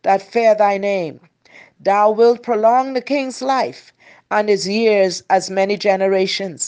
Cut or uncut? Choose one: uncut